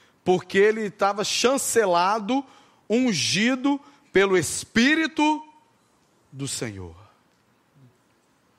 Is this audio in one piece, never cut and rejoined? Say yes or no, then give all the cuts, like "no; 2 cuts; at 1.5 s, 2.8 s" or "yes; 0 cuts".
yes; 0 cuts